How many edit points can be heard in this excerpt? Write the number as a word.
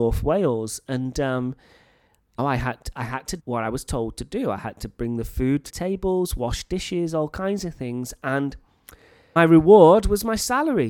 four